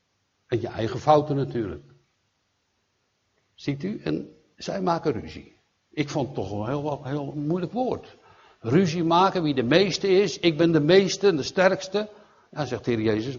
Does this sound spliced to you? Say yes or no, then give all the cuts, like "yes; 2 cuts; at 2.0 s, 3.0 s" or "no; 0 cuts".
no; 0 cuts